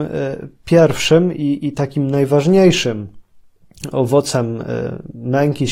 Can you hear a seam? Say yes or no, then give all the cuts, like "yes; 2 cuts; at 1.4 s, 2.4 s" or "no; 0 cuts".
no; 0 cuts